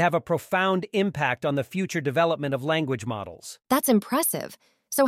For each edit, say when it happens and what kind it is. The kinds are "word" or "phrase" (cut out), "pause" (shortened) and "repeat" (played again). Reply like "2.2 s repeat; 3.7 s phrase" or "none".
3.6 s pause